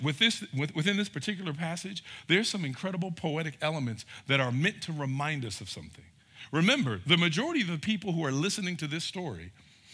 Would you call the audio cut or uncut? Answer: uncut